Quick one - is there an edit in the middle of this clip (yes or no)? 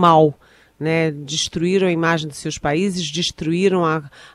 no